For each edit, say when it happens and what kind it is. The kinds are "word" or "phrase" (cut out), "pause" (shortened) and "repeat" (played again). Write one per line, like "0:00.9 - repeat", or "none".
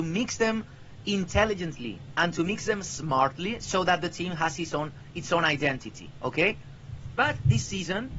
none